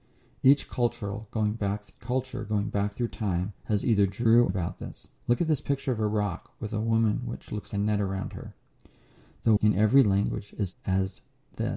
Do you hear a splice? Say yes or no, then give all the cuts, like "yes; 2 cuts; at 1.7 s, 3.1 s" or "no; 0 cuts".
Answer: yes; 6 cuts; at 3.6 s, 4.5 s, 5.2 s, 7.7 s, 9.6 s, 10.7 s